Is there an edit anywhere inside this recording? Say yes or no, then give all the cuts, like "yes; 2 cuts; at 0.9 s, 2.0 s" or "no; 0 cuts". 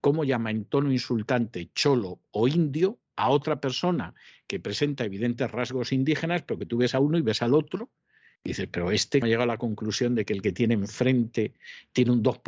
yes; 1 cut; at 9.2 s